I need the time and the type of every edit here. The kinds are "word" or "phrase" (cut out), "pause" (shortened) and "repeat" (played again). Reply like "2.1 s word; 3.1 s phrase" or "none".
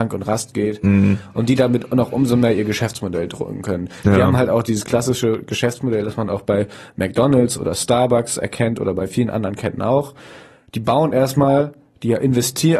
none